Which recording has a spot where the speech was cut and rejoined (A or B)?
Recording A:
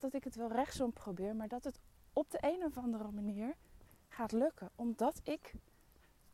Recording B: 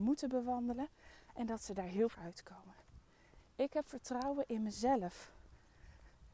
B